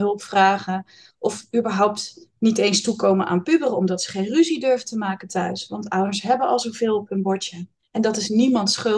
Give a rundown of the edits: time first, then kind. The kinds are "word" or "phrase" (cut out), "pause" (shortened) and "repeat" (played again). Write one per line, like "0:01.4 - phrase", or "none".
0:02.3 - pause
0:07.7 - pause